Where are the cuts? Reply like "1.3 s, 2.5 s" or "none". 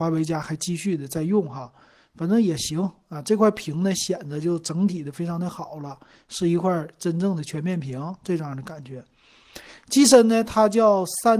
none